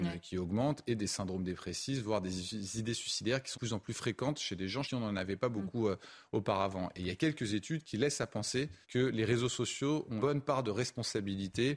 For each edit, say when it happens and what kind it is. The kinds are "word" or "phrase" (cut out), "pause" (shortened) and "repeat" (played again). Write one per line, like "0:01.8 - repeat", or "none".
0:03.5 - word
0:04.8 - word
0:08.8 - pause
0:10.2 - word